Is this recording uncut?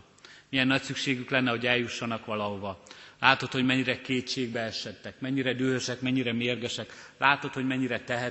yes; 0 cuts

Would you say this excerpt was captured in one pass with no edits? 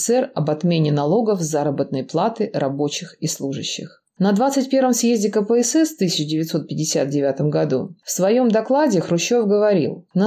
yes; 0 cuts

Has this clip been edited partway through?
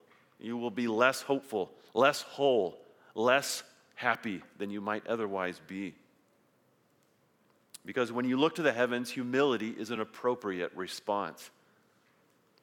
no; 0 cuts

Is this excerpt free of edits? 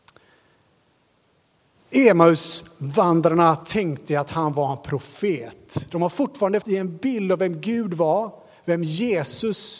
no; 1 cut; at 6.6 s

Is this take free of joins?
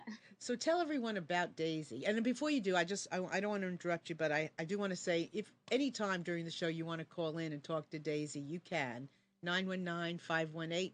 yes; 0 cuts

